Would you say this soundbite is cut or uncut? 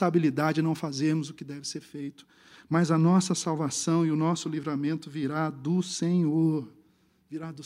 uncut